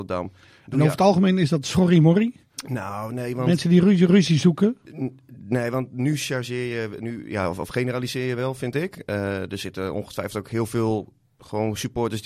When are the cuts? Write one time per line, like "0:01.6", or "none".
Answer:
none

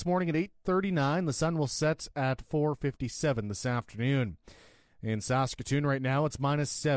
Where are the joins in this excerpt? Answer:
none

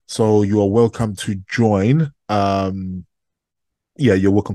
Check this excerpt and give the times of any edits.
none

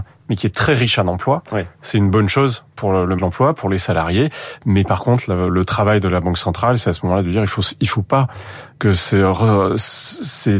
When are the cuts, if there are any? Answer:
0:03.2

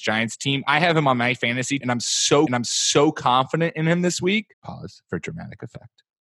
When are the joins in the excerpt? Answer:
0:01.8
0:02.5
0:04.5

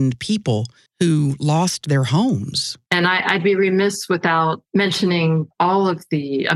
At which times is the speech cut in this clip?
0:02.8

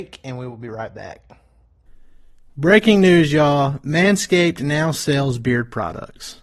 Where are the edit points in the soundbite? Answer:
none

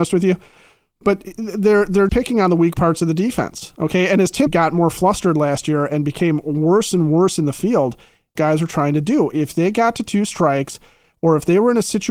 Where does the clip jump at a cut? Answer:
0:02.1
0:04.5
0:08.4

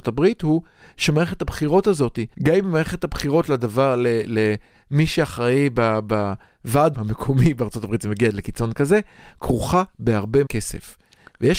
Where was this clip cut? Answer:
0:02.3
0:06.9
0:10.5

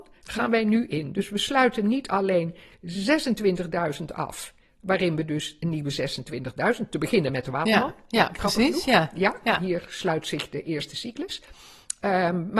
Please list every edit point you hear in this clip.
none

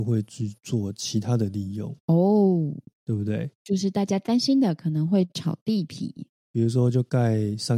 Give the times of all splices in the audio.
0:02.0
0:03.5

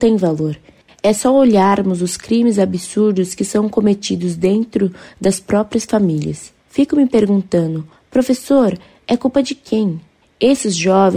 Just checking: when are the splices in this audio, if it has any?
none

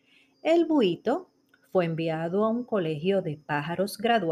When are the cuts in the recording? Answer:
none

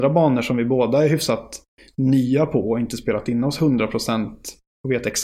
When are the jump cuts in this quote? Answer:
none

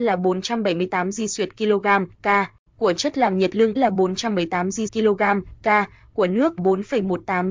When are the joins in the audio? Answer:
0:03.8
0:04.9
0:06.6

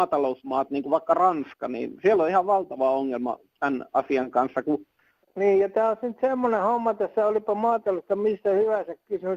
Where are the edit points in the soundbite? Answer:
none

